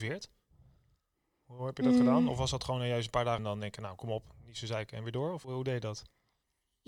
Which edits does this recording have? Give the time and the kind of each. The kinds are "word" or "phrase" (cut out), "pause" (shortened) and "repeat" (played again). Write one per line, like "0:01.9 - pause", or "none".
0:03.4 - word
0:05.4 - word

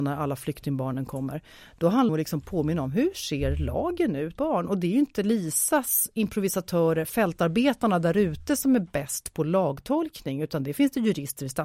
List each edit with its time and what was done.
0:02.1 - phrase
0:04.4 - phrase

